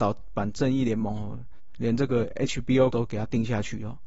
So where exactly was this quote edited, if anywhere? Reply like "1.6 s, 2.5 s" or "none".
2.9 s